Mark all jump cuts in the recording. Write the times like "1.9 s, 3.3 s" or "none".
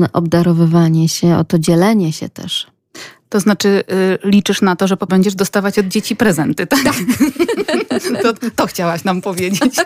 5.1 s

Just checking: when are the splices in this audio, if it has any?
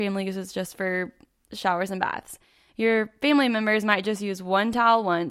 none

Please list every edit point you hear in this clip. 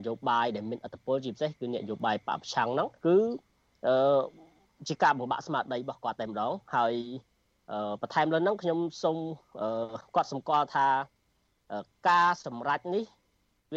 3.0 s

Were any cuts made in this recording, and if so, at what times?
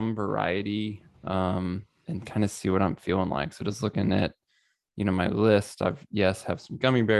none

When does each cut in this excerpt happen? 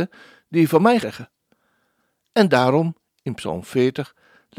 1.0 s

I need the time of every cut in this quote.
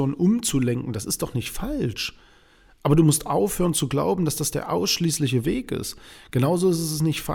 none

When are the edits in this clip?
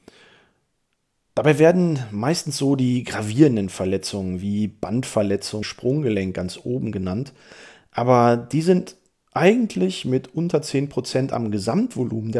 5.6 s

